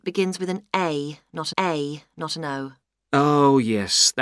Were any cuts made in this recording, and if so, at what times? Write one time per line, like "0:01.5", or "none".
0:01.5